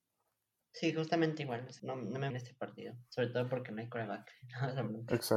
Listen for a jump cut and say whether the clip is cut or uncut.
cut